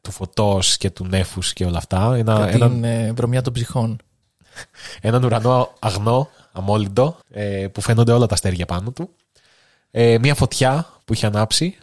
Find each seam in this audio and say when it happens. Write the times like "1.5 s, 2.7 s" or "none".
7.2 s